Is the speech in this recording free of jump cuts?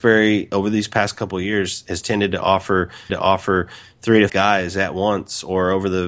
no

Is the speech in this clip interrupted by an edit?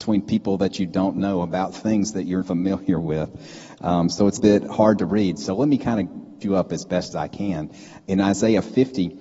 yes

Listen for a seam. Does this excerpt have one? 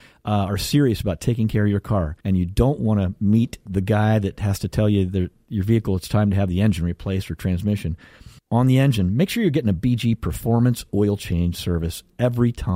yes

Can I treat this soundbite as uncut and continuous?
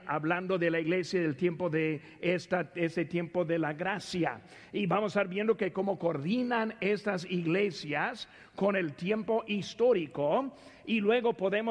yes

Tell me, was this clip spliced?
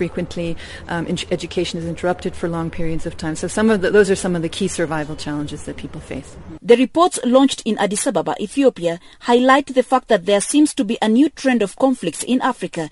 no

